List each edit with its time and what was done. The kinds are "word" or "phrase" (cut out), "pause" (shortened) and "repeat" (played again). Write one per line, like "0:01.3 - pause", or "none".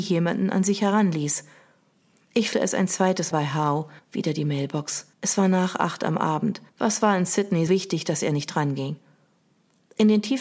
0:02.5 - word
0:03.3 - word
0:04.0 - pause
0:05.1 - pause
0:06.7 - pause
0:07.7 - word